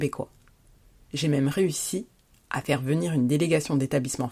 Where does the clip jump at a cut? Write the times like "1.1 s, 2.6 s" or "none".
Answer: none